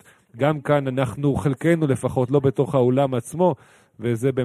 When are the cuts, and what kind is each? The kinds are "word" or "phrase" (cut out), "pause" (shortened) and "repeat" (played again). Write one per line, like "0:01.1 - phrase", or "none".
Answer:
none